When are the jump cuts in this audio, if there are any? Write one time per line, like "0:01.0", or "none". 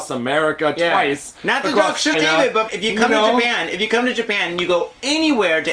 0:02.1
0:02.7